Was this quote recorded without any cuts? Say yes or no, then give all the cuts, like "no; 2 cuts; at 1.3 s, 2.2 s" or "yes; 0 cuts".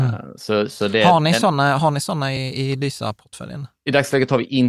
yes; 0 cuts